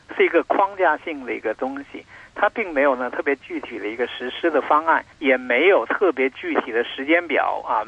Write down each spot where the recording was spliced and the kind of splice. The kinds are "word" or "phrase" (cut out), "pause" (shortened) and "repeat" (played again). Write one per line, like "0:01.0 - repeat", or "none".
0:05.1 - pause